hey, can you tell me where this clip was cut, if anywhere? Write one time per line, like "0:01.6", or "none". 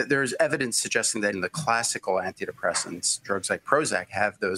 0:01.3